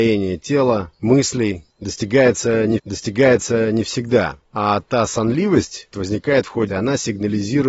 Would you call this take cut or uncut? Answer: cut